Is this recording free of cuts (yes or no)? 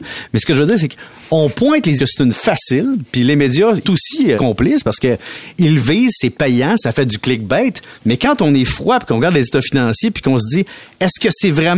no